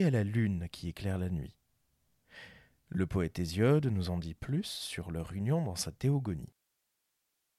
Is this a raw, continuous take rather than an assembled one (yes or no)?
yes